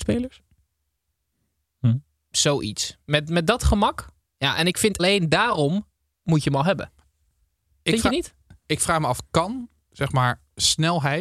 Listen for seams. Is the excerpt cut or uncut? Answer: cut